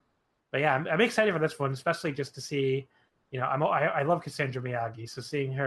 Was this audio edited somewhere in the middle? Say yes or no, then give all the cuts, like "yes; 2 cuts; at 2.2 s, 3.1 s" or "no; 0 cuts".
no; 0 cuts